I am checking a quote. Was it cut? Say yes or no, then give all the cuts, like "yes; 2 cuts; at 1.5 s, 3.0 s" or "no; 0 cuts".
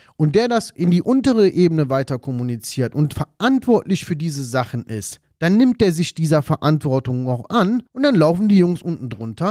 yes; 1 cut; at 7.9 s